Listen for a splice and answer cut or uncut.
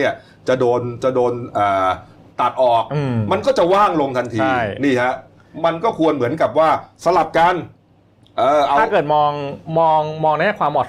uncut